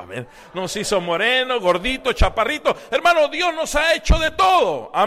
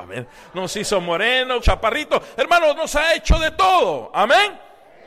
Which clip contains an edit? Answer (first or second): second